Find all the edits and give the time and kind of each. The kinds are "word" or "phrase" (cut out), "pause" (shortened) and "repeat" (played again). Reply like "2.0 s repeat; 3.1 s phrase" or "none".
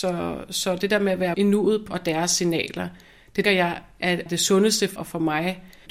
1.3 s word; 1.9 s word; 3.4 s word; 4.3 s word; 5.0 s word